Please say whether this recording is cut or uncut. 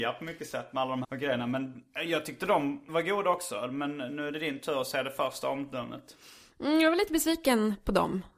cut